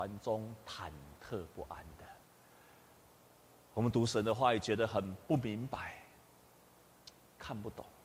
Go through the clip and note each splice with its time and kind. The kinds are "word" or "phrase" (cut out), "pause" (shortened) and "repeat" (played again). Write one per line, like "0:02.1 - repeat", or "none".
none